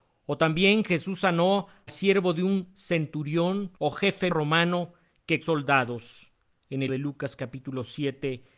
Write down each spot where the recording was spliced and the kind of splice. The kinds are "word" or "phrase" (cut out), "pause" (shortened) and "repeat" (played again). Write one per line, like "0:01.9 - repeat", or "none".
0:01.9 - word
0:03.8 - pause
0:04.3 - word
0:05.4 - phrase
0:06.9 - word